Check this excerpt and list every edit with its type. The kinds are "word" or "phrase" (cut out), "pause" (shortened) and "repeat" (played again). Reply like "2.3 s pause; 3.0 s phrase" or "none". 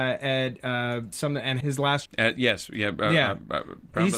1.1 s word; 1.6 s word; 2.1 s word